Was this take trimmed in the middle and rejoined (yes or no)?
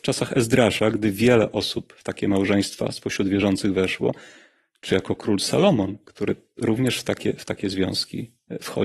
no